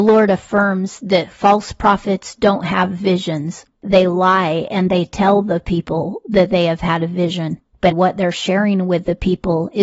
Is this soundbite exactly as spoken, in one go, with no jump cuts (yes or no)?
no